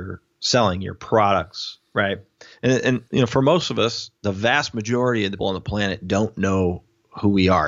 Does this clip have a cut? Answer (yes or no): yes